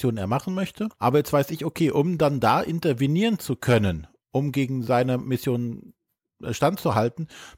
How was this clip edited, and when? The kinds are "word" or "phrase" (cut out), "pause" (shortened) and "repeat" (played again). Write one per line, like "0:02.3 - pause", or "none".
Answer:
0:00.9 - pause